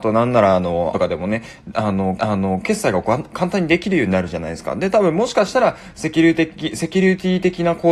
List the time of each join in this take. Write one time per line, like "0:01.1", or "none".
0:00.9
0:02.2

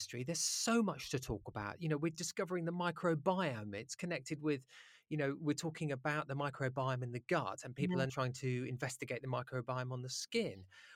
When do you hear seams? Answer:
0:08.1

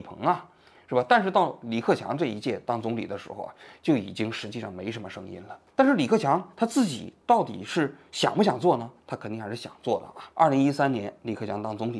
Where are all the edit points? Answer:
0:05.7
0:10.3

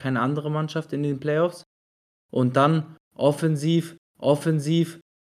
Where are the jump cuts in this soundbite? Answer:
0:04.1

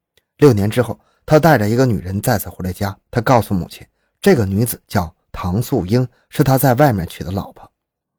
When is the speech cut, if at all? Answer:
0:03.0

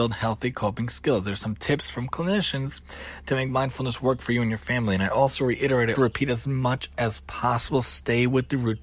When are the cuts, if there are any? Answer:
0:06.0

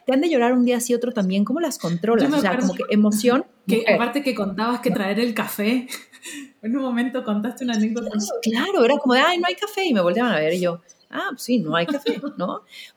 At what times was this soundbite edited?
0:04.9

